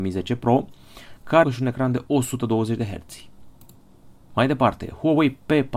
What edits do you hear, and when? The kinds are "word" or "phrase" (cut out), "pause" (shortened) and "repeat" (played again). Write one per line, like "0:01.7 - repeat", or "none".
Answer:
0:01.4 - phrase